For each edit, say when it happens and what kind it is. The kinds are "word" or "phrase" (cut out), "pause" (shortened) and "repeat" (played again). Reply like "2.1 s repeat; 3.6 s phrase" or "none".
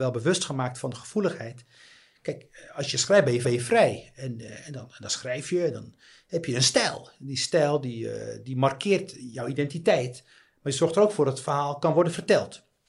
3.4 s repeat